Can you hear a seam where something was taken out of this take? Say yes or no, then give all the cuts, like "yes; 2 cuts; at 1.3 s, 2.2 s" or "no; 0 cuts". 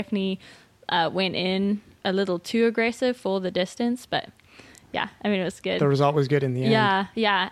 yes; 1 cut; at 2.0 s